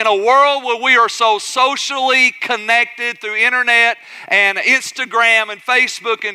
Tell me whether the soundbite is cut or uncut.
uncut